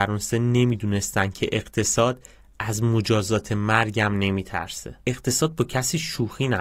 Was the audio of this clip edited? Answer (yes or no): yes